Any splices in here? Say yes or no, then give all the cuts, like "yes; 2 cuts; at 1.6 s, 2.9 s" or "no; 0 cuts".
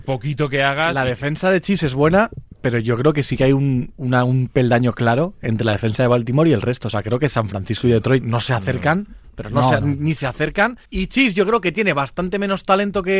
yes; 2 cuts; at 8.2 s, 10.8 s